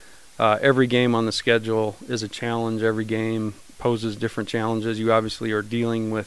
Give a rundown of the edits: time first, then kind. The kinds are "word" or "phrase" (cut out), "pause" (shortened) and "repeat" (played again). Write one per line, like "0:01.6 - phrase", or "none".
none